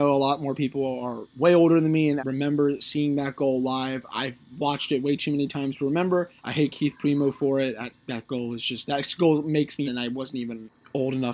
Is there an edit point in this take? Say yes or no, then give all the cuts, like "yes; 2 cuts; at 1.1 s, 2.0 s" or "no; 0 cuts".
yes; 3 cuts; at 2.2 s, 6.4 s, 9.9 s